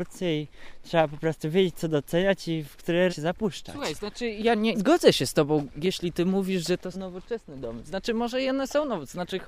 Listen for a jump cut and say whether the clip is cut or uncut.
cut